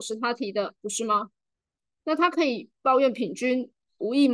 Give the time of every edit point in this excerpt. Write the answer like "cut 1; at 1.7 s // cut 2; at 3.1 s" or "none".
none